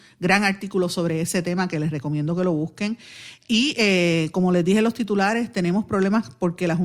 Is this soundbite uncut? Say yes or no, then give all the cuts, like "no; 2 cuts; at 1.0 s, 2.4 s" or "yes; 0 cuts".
yes; 0 cuts